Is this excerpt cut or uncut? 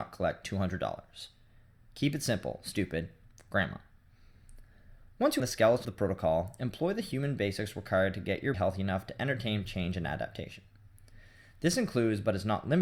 cut